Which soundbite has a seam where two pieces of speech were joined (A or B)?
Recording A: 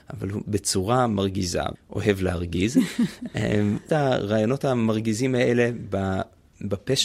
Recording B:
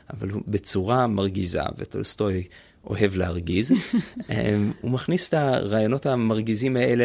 A